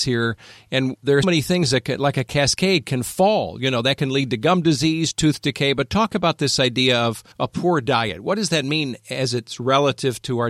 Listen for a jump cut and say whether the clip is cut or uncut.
cut